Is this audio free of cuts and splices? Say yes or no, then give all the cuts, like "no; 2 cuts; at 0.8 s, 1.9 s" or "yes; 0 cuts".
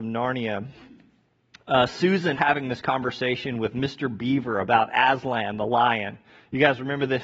no; 1 cut; at 2.3 s